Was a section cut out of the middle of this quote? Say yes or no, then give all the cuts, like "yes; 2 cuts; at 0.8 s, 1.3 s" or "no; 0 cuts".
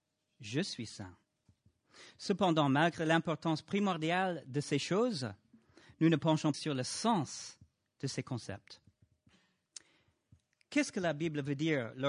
yes; 1 cut; at 6.5 s